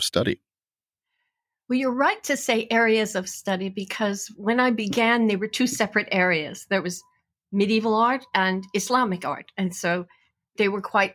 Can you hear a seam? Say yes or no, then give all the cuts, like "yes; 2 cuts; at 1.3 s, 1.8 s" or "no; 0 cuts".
no; 0 cuts